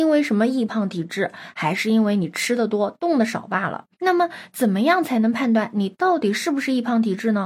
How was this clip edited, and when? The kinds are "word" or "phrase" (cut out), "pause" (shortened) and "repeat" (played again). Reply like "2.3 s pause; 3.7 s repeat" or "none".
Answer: 3.9 s pause